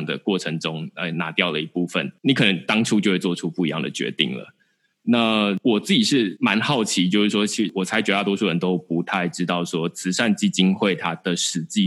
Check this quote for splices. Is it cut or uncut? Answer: uncut